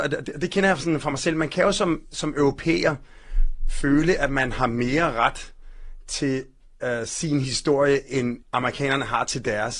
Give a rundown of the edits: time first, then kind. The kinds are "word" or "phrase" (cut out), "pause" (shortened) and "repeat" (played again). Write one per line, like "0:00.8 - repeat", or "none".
0:08.4 - pause